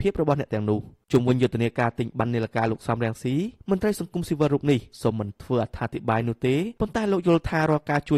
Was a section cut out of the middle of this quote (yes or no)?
yes